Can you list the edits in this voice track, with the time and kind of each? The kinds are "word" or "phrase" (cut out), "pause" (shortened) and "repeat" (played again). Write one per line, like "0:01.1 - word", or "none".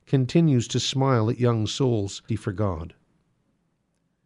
0:02.3 - word